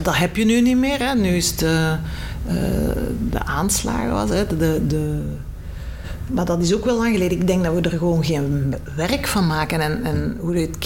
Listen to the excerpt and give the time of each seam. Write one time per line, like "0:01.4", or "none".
0:06.3